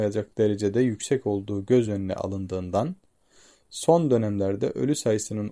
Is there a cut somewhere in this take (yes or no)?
no